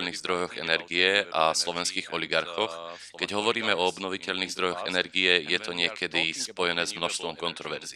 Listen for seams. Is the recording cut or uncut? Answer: uncut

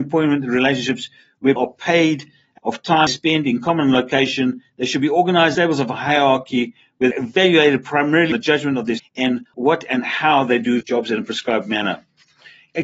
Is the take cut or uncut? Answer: cut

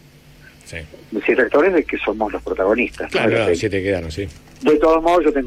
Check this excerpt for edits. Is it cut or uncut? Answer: uncut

